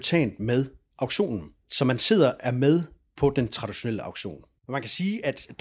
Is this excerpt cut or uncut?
uncut